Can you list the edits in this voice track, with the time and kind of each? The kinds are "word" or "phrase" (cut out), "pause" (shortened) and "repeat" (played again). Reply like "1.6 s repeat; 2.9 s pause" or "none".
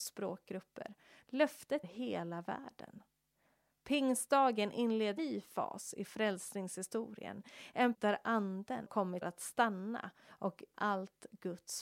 1.8 s word; 5.2 s word; 7.9 s word; 8.9 s word; 9.2 s word; 10.7 s word